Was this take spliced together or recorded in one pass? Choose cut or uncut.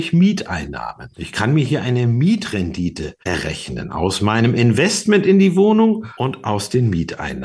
cut